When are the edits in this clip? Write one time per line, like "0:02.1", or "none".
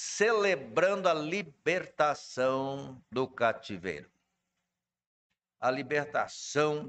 none